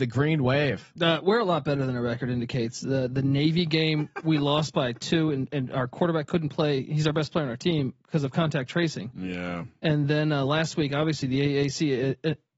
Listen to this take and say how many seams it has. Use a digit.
0